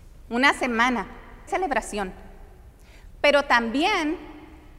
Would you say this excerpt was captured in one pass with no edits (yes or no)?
no